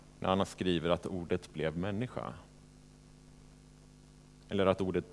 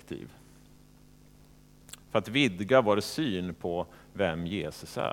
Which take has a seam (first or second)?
second